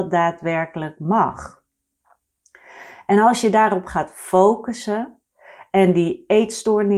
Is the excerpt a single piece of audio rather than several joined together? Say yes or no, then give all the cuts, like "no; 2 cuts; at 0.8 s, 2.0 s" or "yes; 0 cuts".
yes; 0 cuts